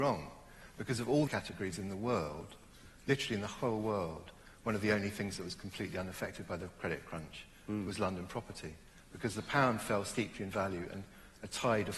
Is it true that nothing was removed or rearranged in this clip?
no; 1 cut; at 1.3 s

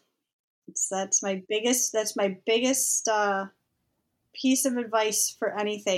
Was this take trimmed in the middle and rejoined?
no; 0 cuts

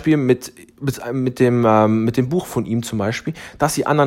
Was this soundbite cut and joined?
no; 0 cuts

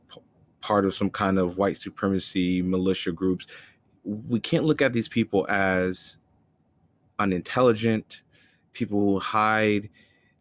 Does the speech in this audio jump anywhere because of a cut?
no; 0 cuts

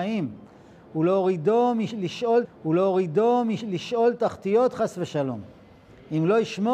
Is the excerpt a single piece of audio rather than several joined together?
no; 1 cut; at 2.4 s

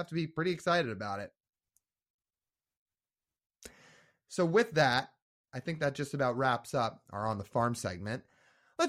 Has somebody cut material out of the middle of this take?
no; 0 cuts

